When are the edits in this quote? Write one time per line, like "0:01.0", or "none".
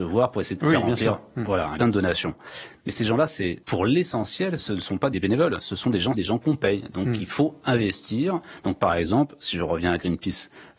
0:01.8
0:03.6
0:04.6
0:06.1